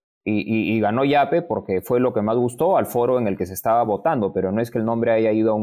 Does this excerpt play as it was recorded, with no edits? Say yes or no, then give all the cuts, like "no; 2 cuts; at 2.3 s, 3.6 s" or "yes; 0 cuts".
yes; 0 cuts